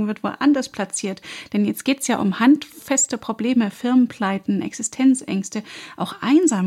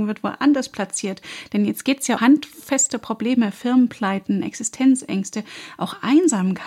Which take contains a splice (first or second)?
second